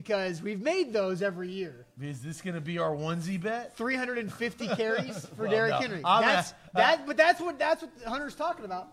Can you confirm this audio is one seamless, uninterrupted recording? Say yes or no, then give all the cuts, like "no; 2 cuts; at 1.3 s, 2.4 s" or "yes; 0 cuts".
yes; 0 cuts